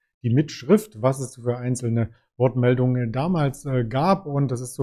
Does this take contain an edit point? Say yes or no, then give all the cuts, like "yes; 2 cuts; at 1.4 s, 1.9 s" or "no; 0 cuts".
no; 0 cuts